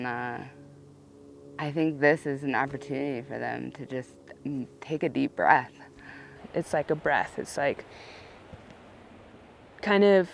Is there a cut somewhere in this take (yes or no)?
no